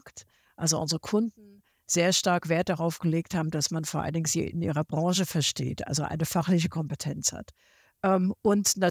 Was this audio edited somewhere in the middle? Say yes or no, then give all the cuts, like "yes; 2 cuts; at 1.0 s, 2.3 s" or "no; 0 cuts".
no; 0 cuts